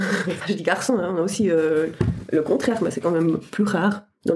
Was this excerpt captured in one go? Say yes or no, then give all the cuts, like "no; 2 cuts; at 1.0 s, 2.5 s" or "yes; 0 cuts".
yes; 0 cuts